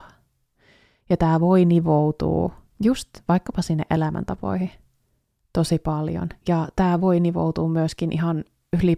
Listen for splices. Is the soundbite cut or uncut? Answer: uncut